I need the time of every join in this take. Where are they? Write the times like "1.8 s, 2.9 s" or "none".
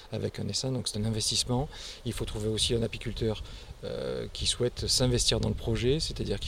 0.9 s

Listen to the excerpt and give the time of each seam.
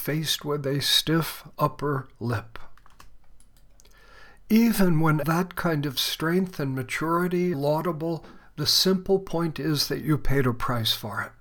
5.2 s, 7.5 s

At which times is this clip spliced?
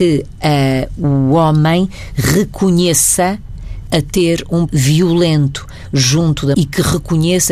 1.0 s, 3.9 s, 4.7 s, 6.5 s

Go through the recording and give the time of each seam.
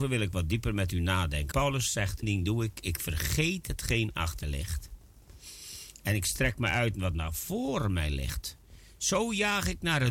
1.5 s, 2.2 s, 4.4 s

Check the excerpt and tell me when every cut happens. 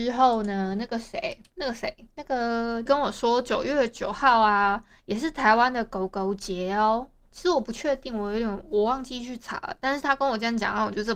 1.5 s, 2.1 s, 2.9 s

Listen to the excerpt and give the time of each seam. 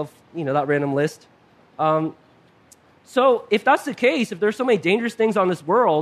none

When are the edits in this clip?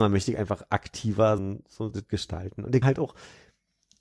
1.4 s, 1.9 s, 2.8 s

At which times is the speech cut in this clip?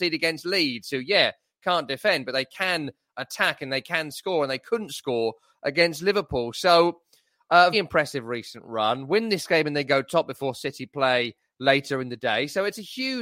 7.7 s

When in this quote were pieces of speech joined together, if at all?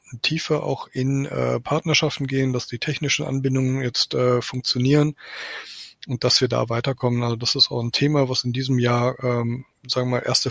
none

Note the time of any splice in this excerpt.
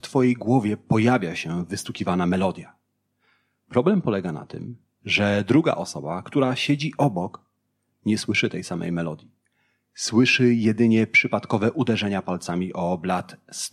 none

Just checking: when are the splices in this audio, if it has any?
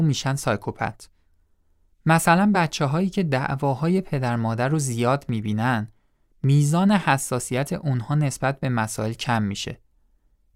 none

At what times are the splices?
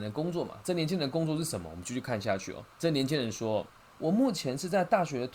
2.7 s, 3.7 s

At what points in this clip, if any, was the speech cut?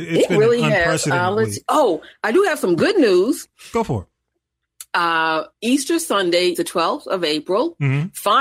5.5 s, 6.5 s

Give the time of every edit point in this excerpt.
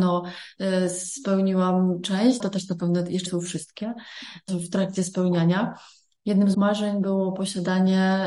2.4 s, 3.3 s, 4.5 s, 6.5 s

